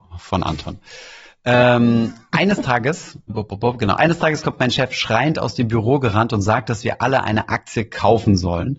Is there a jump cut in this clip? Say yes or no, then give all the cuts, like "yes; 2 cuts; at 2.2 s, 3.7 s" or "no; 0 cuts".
yes; 1 cut; at 3.3 s